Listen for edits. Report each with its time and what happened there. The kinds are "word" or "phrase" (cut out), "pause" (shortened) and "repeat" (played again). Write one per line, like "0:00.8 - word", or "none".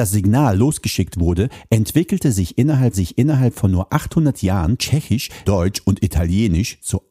0:02.9 - repeat
0:05.5 - word